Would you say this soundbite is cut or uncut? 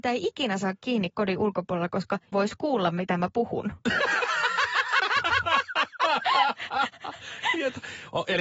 cut